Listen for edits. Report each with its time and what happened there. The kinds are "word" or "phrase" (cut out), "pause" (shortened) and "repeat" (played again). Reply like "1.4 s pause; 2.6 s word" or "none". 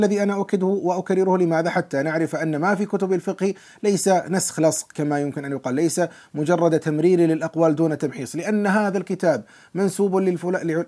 none